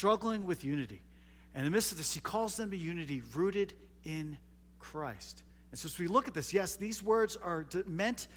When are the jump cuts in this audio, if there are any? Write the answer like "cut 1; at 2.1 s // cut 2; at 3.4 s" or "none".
none